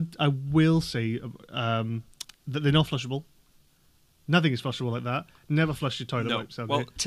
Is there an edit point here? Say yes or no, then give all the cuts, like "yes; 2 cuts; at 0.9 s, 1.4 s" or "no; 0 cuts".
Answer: no; 0 cuts